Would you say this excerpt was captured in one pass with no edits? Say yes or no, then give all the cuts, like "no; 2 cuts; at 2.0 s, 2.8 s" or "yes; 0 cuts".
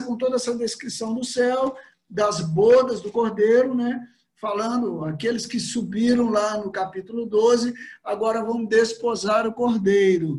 yes; 0 cuts